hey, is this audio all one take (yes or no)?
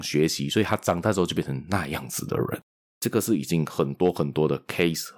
yes